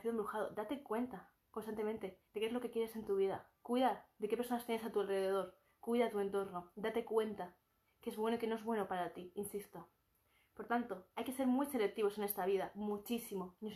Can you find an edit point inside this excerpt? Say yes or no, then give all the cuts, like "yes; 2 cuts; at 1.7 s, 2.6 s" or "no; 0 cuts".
yes; 2 cuts; at 2.2 s, 3.6 s